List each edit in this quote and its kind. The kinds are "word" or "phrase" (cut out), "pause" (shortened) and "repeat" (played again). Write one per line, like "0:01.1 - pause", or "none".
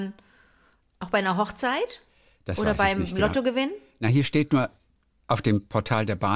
none